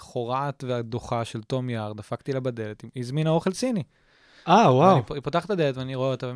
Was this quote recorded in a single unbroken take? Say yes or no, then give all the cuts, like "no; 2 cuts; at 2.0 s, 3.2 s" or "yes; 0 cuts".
yes; 0 cuts